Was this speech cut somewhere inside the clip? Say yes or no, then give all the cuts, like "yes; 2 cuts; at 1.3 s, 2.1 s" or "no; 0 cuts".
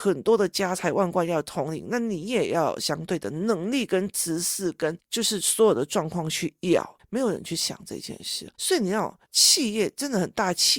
yes; 2 cuts; at 8.5 s, 9.2 s